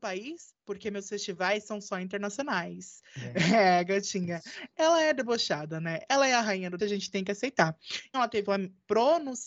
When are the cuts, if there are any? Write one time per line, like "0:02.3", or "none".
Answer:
0:06.8
0:08.1
0:08.4